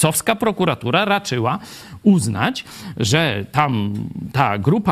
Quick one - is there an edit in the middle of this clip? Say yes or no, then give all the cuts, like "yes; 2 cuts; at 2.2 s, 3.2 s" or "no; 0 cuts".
no; 0 cuts